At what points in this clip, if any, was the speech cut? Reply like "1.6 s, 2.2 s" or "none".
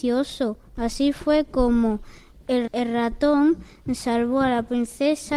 2.7 s